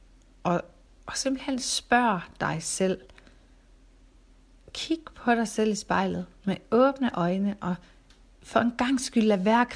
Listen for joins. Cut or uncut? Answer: uncut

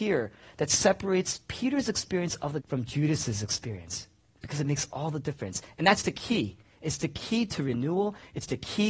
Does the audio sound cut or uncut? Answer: cut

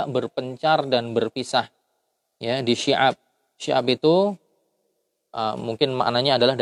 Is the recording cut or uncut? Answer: uncut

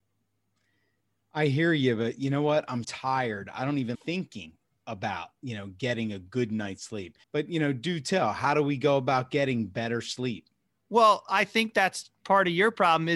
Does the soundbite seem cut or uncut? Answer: cut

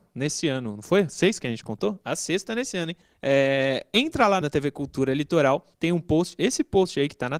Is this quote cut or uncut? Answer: cut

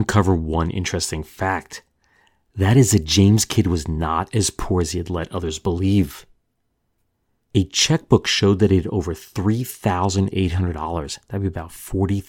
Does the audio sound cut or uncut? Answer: uncut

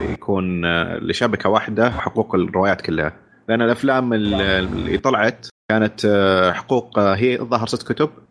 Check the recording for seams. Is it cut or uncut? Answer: uncut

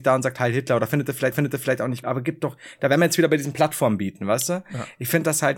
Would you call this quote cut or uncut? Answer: cut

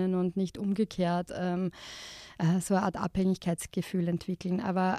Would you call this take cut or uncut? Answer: uncut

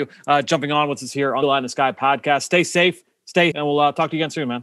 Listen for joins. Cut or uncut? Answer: cut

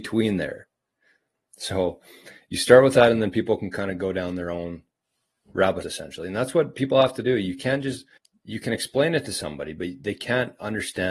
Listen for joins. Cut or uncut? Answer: cut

